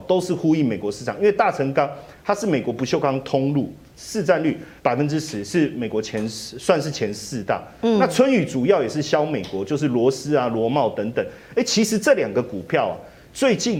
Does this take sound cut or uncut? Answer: cut